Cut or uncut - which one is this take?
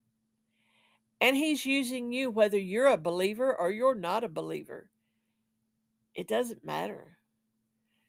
uncut